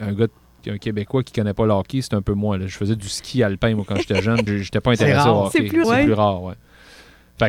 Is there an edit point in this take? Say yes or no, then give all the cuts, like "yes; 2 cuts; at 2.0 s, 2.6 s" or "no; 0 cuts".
yes; 2 cuts; at 4.5 s, 5.8 s